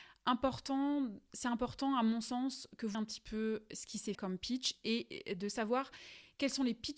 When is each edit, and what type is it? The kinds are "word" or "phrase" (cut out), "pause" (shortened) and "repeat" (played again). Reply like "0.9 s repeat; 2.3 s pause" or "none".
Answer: 2.9 s word; 4.1 s word